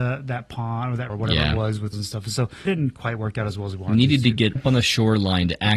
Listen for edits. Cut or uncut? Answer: cut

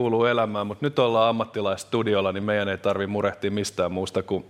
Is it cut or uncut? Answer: uncut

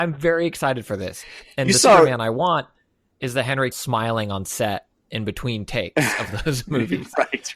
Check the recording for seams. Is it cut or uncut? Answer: cut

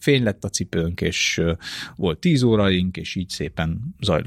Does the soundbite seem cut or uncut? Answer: uncut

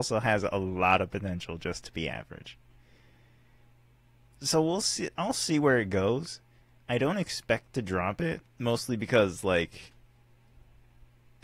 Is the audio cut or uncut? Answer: cut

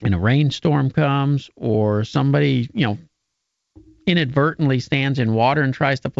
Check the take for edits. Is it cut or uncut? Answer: uncut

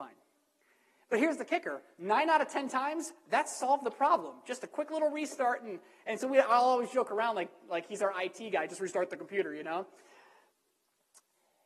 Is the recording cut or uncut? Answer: uncut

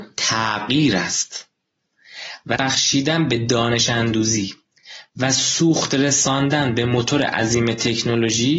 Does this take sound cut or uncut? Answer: cut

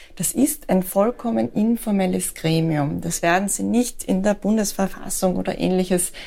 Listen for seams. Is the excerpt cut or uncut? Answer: uncut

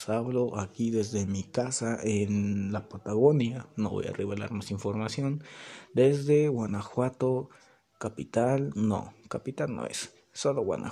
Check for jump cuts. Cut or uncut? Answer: uncut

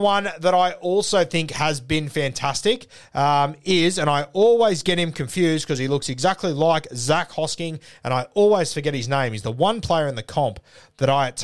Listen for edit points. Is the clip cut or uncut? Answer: uncut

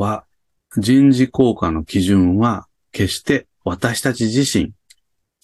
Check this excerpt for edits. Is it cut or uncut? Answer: uncut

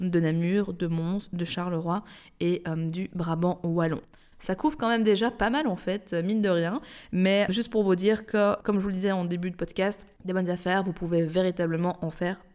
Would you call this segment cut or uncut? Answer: uncut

